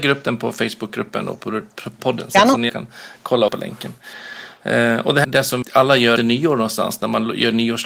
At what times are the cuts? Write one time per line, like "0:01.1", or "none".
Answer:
0:02.0
0:02.7
0:03.5
0:05.2
0:05.6
0:06.2

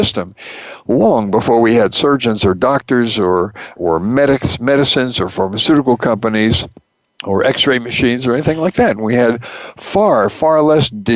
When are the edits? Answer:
0:03.8
0:07.0

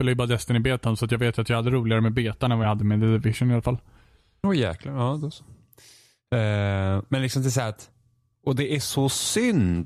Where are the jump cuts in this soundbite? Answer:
none

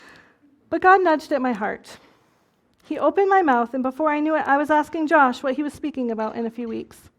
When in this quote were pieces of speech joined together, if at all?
none

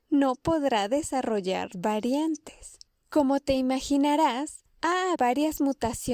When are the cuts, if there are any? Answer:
0:01.7
0:05.2

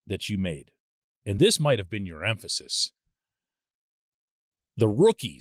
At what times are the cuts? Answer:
none

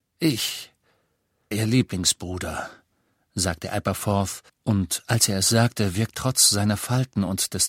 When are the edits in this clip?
0:01.5
0:04.5
0:06.1

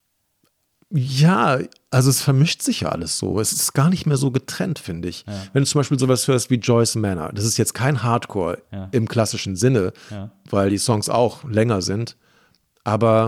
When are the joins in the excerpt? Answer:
none

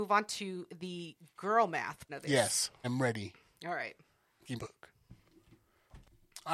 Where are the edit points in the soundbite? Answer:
0:02.1
0:02.8
0:04.6

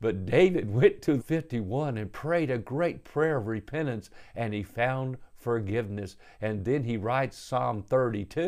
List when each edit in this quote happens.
0:01.2

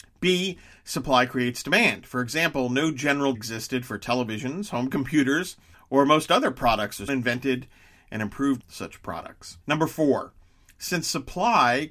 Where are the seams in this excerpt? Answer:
0:03.3
0:05.7
0:07.1
0:08.6
0:09.6

